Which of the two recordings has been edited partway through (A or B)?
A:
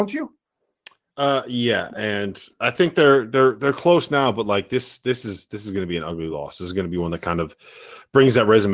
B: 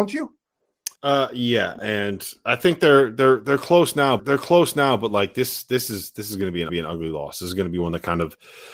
B